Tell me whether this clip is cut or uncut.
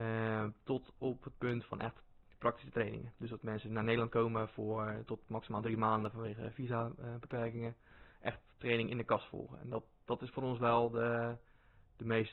uncut